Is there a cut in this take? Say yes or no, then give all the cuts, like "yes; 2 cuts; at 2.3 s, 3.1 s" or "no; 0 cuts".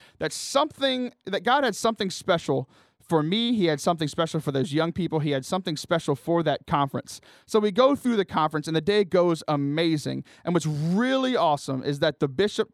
no; 0 cuts